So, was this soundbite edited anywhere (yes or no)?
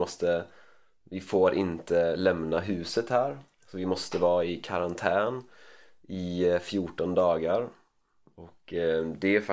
no